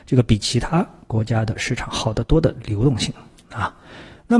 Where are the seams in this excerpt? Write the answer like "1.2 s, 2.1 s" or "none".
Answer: none